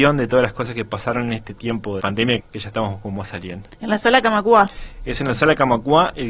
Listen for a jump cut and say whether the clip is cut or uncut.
cut